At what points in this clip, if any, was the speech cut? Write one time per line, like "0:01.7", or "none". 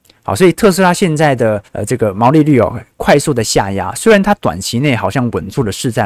0:01.7